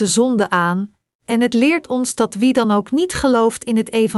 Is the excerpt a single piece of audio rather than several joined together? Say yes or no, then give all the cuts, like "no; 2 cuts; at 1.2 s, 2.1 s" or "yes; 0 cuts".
yes; 0 cuts